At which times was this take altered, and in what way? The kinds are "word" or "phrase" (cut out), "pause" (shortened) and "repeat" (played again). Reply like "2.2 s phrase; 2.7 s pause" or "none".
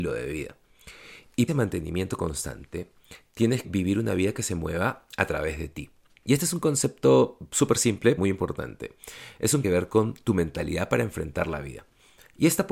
1.5 s phrase; 3.6 s word; 6.1 s pause; 8.2 s word; 9.6 s phrase